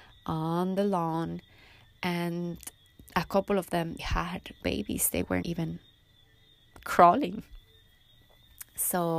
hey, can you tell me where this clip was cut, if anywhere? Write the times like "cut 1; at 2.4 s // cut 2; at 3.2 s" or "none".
cut 1; at 4.0 s // cut 2; at 4.6 s // cut 3; at 5.4 s